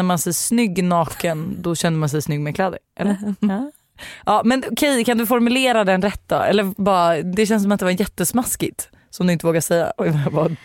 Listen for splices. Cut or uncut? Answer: uncut